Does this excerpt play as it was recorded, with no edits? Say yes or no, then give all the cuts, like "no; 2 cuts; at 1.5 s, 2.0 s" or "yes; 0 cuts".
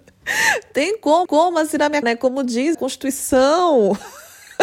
no; 3 cuts; at 1.3 s, 2.0 s, 2.7 s